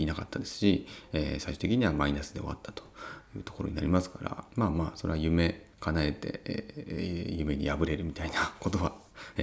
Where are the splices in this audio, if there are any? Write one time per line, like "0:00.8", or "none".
0:04.5

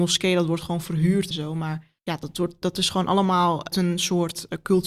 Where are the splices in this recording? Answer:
0:01.3
0:02.0
0:03.7

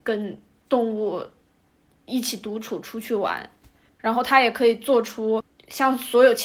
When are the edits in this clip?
none

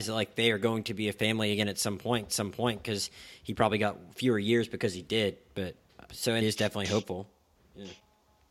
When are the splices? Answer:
0:02.3
0:06.1
0:06.4

